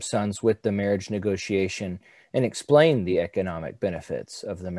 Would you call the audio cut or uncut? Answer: uncut